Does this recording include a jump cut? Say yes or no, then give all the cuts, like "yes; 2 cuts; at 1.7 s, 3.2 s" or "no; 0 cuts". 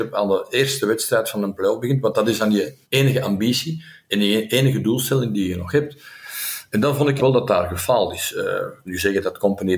yes; 3 cuts; at 2.8 s, 7.2 s, 8.9 s